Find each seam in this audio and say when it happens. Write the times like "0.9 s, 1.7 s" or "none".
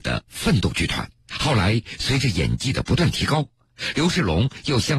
1.2 s

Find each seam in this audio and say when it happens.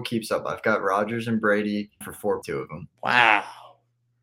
2.0 s, 2.4 s, 2.9 s

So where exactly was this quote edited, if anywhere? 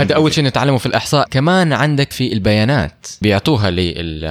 1.3 s, 2.1 s, 3.2 s

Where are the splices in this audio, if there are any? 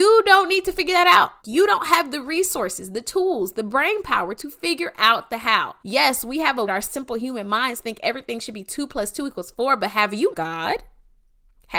1.4 s, 5.8 s, 6.7 s, 10.3 s

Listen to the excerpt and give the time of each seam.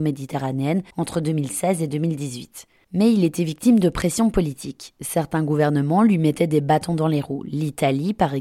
0.9 s

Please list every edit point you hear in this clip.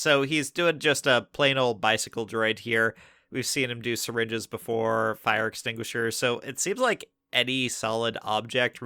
none

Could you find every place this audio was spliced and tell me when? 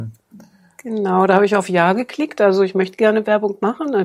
none

